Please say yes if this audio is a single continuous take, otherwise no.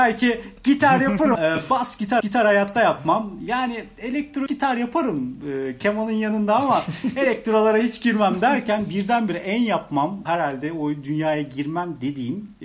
no